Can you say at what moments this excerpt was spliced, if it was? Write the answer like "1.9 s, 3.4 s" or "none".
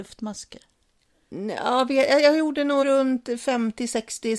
2.8 s